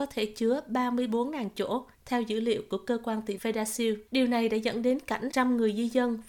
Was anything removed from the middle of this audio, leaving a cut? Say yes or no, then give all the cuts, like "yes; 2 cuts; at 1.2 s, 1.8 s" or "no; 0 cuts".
yes; 4 cuts; at 1.9 s, 3.4 s, 4.1 s, 5.3 s